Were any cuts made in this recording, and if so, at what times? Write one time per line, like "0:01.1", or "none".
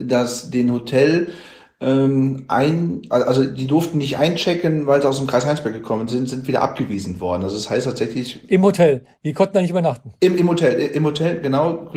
none